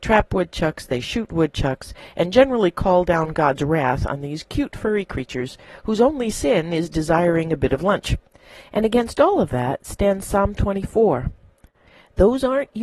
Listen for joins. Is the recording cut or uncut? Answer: uncut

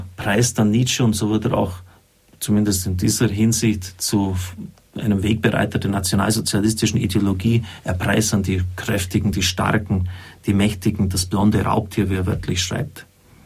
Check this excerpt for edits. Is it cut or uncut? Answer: uncut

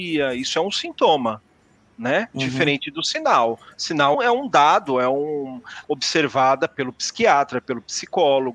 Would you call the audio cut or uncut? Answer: cut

